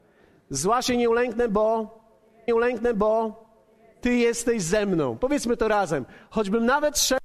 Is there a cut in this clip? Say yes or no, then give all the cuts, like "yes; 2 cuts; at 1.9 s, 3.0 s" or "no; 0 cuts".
yes; 1 cut; at 2.5 s